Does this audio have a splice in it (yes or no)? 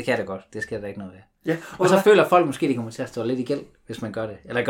no